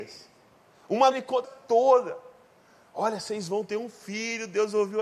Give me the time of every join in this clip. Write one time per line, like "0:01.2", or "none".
0:01.1
0:01.4